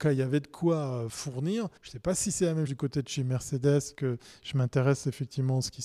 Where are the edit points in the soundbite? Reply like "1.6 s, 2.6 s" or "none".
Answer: 1.8 s, 2.7 s, 3.9 s